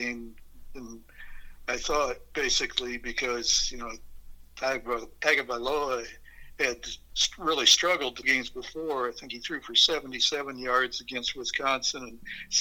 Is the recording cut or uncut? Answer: cut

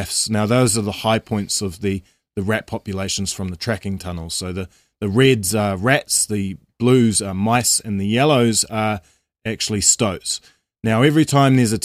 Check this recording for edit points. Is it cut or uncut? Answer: uncut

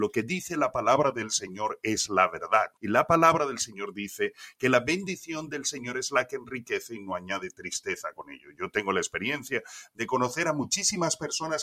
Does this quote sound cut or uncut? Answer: cut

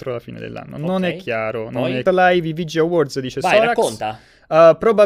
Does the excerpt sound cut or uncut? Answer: cut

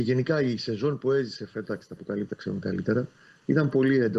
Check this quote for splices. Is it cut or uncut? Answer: cut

